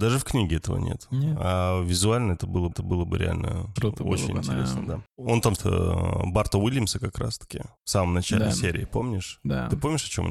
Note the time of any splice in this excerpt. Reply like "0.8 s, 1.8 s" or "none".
2.7 s, 3.8 s, 5.6 s, 7.8 s